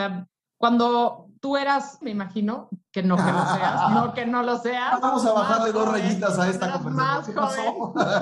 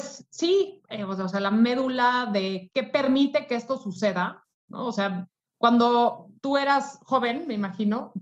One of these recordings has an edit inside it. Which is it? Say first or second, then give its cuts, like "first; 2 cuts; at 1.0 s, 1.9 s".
first; 1 cut; at 2.0 s